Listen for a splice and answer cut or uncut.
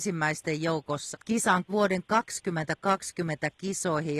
cut